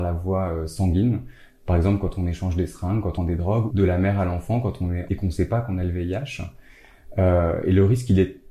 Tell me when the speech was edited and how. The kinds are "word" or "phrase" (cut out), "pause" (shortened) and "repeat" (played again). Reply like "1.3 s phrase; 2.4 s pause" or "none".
3.2 s word; 3.7 s word; 5.1 s word